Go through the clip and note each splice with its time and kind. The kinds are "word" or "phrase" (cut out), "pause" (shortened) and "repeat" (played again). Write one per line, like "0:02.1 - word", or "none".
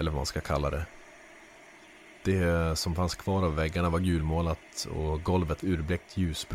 0:02.2 - pause
0:05.6 - phrase

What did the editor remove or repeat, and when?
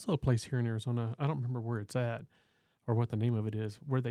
none

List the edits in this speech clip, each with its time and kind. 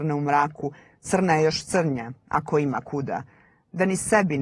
none

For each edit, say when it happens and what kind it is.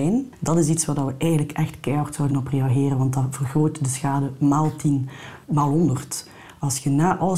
0:02.3 - word
0:05.4 - pause

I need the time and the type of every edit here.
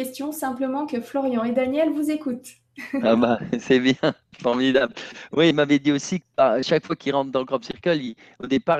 0:05.5 - word
0:06.2 - word

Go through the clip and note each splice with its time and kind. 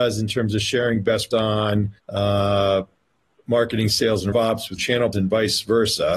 0:01.3 - word
0:02.0 - pause
0:04.3 - word
0:04.8 - word
0:05.1 - word

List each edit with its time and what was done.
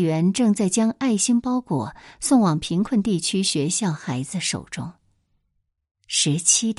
none

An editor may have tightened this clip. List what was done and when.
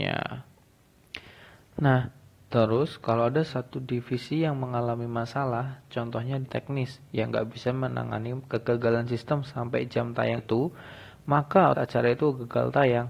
0:03.5 - word
0:06.4 - word
0:10.4 - word
0:11.7 - word

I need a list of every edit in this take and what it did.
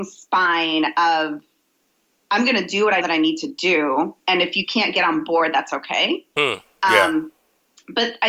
0:03.0 - word

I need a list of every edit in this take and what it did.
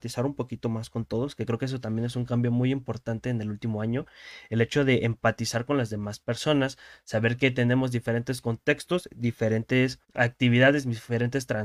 0:10.0 - pause

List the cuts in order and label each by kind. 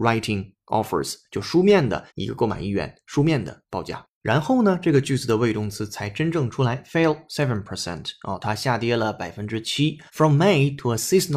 0:02.1 - pause
0:10.1 - pause

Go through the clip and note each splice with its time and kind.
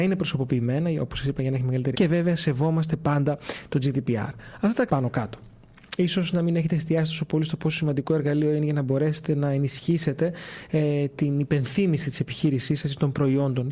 0:01.9 - word
0:04.9 - word

